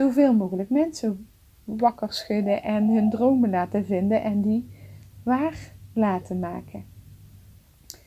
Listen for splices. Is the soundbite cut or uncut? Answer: uncut